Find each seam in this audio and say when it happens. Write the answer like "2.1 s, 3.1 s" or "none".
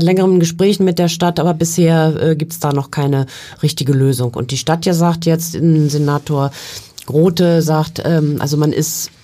none